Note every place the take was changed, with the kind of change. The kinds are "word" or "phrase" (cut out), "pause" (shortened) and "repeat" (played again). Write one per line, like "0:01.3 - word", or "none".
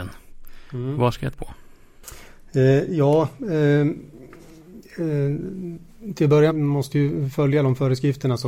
0:01.3 - word
0:06.5 - phrase